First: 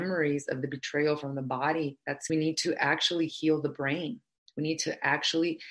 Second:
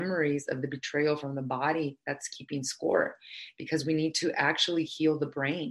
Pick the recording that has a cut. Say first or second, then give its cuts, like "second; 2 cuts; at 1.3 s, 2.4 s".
first; 1 cut; at 2.3 s